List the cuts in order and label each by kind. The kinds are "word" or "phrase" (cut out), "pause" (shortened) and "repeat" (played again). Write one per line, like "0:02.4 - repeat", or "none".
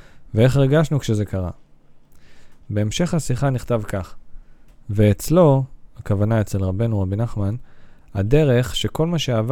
none

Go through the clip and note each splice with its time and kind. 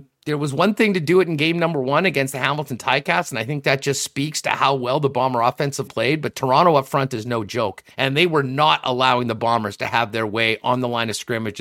0:05.9 - word
0:07.9 - pause

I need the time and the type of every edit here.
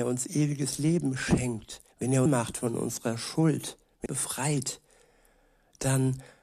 0:01.9 - pause
0:02.3 - phrase
0:04.1 - phrase

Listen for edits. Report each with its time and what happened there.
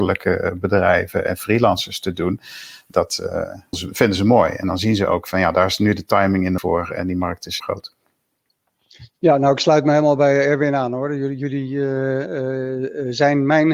0:03.7 - word
0:06.6 - word
0:07.6 - word

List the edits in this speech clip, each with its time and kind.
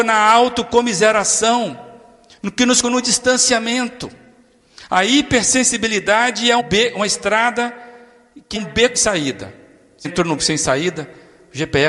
0:02.8 - word
0:06.6 - word
0:08.6 - word
0:08.9 - word
0:10.0 - word
0:10.4 - word

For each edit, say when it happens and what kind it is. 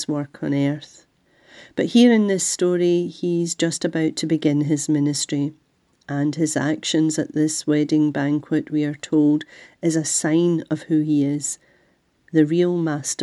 0:01.2 - pause

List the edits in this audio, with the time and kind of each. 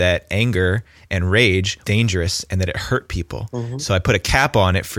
0:01.8 - word

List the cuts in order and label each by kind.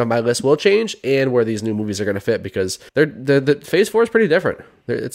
0:02.9 - pause

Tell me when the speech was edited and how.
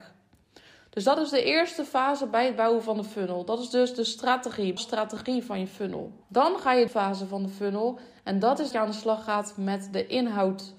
0:04.8 - word
0:06.2 - pause
0:06.9 - phrase
0:08.7 - word

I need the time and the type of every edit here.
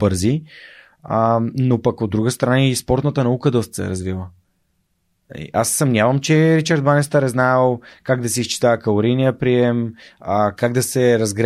none

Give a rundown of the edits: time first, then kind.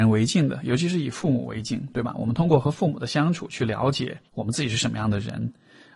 0:04.3 - pause

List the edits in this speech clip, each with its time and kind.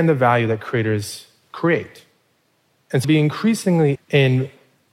0:03.0 - word
0:03.9 - word

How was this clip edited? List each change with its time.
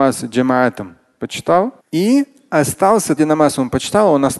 0:01.8 - pause
0:03.2 - word

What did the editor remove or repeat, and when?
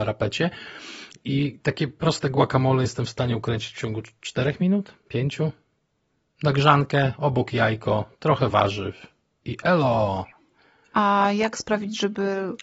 none

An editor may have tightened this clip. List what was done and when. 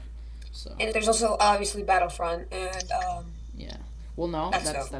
0:00.9 - phrase

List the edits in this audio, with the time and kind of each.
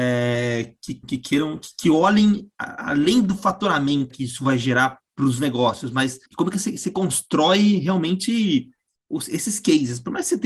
0:01.0 - word
0:04.1 - word
0:06.3 - pause

